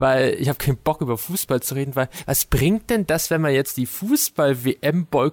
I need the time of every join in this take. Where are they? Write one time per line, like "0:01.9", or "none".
none